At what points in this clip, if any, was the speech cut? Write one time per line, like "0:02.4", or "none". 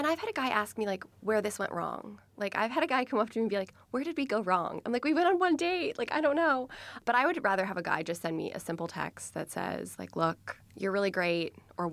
0:01.1
0:10.6